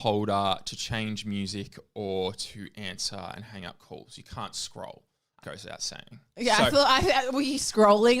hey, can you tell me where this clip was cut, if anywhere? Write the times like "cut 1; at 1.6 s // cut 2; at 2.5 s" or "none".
cut 1; at 5.4 s